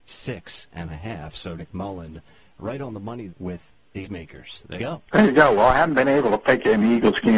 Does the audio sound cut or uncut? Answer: cut